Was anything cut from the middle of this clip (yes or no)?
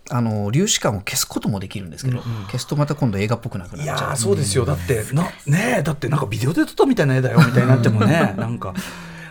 no